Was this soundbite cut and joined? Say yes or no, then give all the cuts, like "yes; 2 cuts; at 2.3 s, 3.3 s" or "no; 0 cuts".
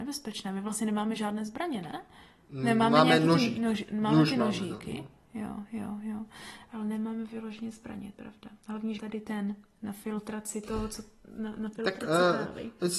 yes; 2 cuts; at 8.1 s, 9.0 s